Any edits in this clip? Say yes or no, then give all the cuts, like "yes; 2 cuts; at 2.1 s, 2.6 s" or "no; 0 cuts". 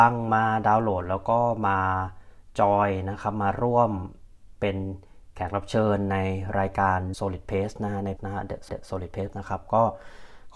yes; 4 cuts; at 7.1 s, 8.2 s, 8.7 s, 9.3 s